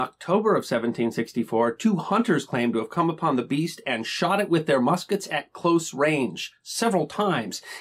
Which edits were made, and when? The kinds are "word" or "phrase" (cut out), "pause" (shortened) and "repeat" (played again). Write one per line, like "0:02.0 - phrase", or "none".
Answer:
none